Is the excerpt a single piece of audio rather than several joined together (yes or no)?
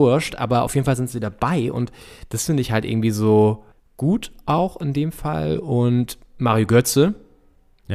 no